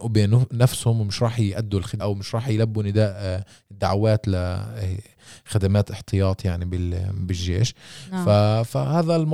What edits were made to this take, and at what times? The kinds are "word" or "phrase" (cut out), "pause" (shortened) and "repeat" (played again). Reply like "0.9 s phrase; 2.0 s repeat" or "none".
2.0 s word